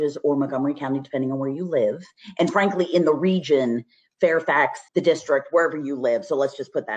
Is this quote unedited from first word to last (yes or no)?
no